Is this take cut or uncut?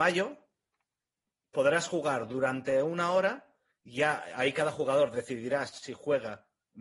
uncut